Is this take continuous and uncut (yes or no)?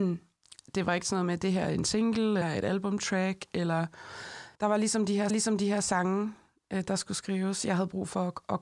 no